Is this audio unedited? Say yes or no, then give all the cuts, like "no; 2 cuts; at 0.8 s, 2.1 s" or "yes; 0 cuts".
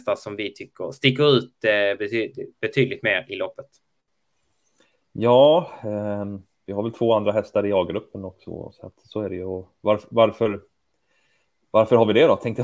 yes; 0 cuts